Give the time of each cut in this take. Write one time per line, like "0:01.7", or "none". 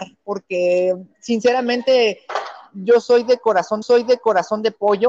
0:03.8